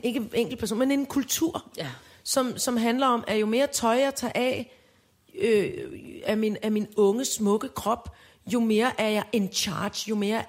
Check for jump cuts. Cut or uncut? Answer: uncut